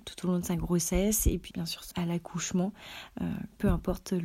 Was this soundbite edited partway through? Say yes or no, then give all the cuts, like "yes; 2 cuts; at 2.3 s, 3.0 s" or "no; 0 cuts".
yes; 2 cuts; at 1.5 s, 1.9 s